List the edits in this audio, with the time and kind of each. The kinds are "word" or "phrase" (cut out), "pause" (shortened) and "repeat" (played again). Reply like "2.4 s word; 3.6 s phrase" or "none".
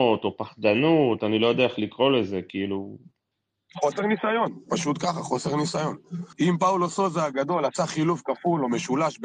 3.3 s pause; 6.3 s pause